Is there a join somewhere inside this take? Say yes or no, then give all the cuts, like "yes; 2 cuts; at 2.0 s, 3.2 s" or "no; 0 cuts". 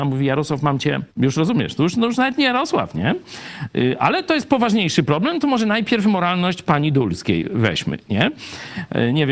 yes; 1 cut; at 1.1 s